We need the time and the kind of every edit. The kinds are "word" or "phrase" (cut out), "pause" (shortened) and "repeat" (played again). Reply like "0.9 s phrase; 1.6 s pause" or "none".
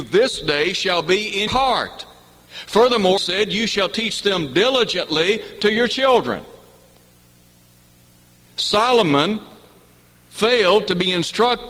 1.5 s word; 3.2 s word